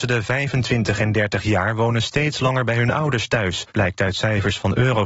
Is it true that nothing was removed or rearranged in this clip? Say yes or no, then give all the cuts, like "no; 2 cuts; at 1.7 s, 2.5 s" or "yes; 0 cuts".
no; 1 cut; at 3.7 s